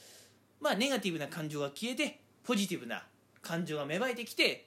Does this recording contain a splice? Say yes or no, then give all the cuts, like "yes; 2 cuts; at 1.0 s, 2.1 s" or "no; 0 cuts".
no; 0 cuts